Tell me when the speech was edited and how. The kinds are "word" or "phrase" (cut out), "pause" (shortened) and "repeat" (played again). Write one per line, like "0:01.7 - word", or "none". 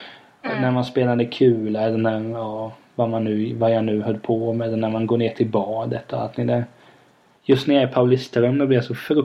none